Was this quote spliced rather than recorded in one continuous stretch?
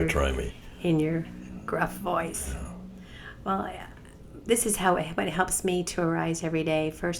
no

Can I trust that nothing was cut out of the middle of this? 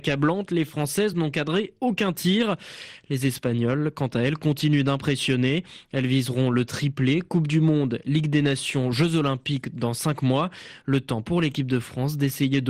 yes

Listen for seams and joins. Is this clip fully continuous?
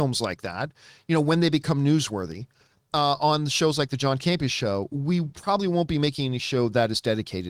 yes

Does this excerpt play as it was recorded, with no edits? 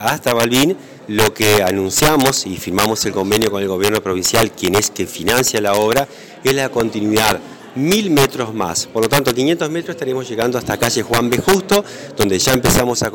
no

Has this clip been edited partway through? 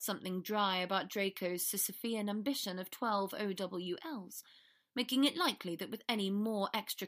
no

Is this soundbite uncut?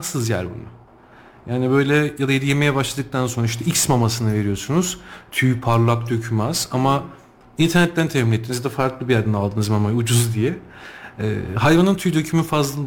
yes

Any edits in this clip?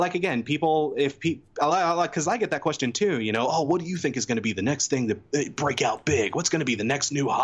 no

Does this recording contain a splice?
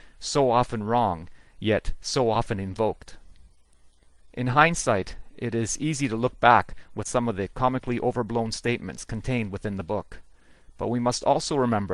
yes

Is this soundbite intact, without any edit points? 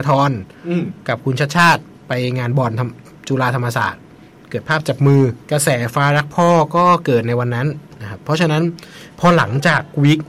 no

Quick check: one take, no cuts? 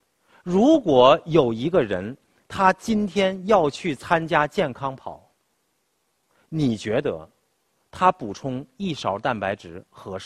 yes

